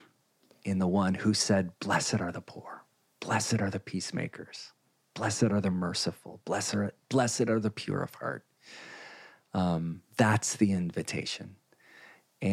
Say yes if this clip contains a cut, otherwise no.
no